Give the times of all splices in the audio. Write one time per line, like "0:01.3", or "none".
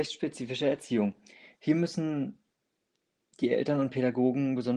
none